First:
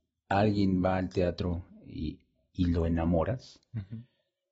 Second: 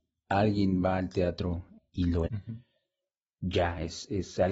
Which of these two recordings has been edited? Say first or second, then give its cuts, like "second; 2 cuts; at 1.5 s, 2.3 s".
second; 2 cuts; at 1.8 s, 2.3 s